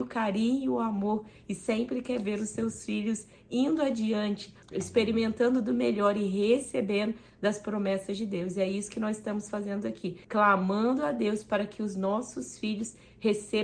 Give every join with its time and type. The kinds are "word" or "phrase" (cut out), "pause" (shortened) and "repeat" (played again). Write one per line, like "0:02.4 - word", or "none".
0:04.6 - pause
0:10.2 - pause